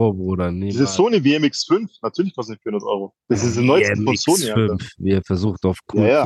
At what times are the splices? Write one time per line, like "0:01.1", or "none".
0:03.2